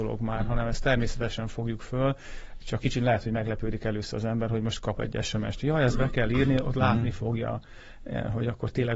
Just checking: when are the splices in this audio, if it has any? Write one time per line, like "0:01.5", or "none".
0:02.8